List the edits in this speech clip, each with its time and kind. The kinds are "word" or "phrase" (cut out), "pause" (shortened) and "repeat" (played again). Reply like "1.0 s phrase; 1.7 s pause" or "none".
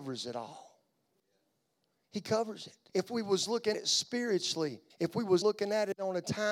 2.9 s pause; 3.7 s word; 4.9 s pause; 5.4 s word

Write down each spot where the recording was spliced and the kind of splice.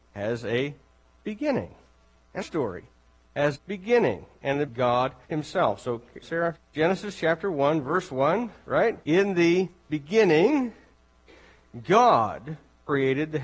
2.4 s word; 3.5 s word; 4.7 s phrase; 5.2 s pause; 6.2 s word; 6.6 s phrase; 9.0 s pause

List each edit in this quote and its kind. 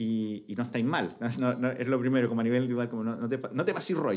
none

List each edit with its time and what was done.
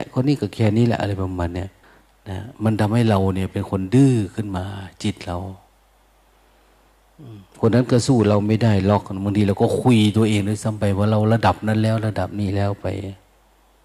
1.8 s pause; 2.5 s pause

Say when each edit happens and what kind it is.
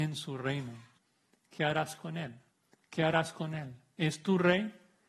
1.0 s pause; 2.5 s pause

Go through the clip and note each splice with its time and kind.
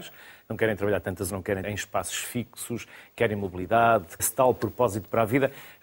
1.3 s word; 1.6 s word; 4.2 s word

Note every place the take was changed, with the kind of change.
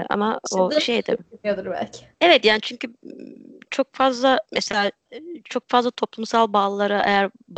2.1 s pause; 4.4 s pause

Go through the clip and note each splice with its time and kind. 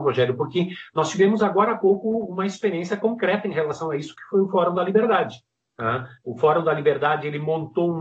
6.2 s pause

